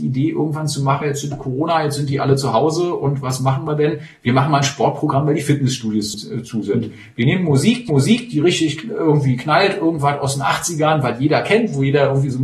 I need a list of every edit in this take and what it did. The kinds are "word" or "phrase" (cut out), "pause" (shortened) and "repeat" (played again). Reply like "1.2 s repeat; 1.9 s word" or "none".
1.0 s word; 6.1 s word; 7.9 s repeat